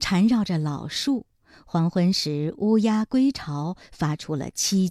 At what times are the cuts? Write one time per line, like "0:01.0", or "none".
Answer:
none